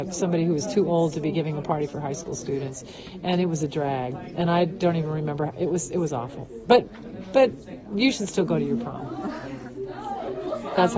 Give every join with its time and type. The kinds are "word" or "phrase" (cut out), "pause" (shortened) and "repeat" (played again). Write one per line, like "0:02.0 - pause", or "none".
none